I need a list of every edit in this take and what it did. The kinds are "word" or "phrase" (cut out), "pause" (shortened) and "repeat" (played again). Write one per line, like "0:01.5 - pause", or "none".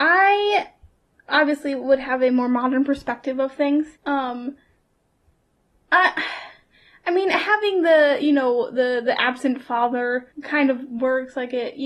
0:04.0 - pause
0:10.3 - pause